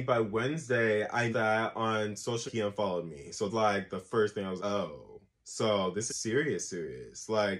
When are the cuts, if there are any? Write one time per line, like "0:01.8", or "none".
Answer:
0:01.3
0:02.5
0:03.5
0:04.6
0:05.3
0:06.1

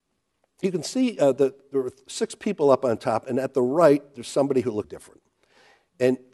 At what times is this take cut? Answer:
0:04.8

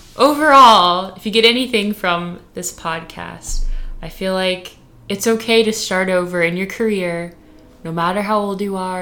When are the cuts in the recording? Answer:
none

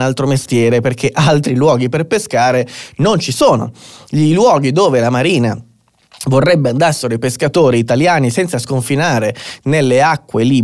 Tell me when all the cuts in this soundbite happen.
none

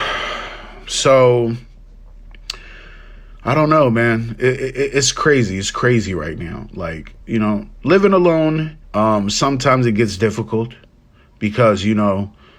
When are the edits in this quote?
0:07.2
0:08.8

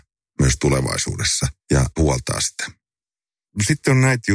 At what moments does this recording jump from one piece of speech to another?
0:01.6

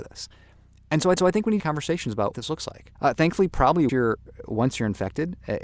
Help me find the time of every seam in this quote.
0:01.2
0:01.6
0:02.3
0:02.9
0:03.9

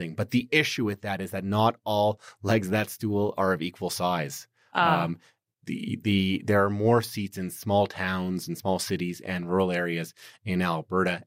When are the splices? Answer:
none

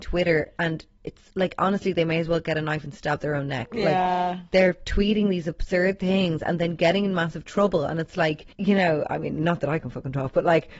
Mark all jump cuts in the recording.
0:08.5

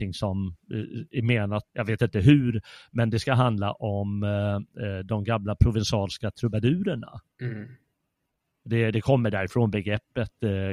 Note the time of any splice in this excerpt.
0:01.7

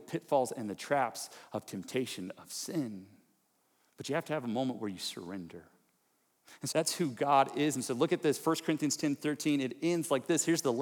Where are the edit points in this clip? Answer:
0:06.7

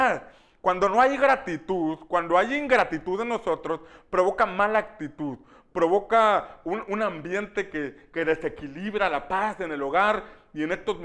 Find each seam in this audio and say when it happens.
none

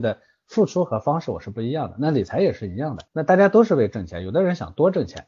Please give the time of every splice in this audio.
0:03.1

